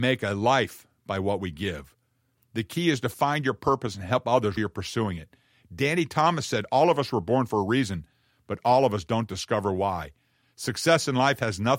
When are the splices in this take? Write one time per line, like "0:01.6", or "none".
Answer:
0:04.6